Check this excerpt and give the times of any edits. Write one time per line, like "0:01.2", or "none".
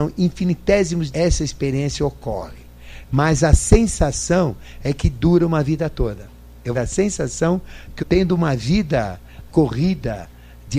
0:01.1
0:06.7
0:08.0
0:09.5